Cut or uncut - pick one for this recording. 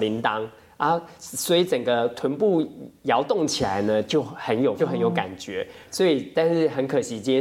cut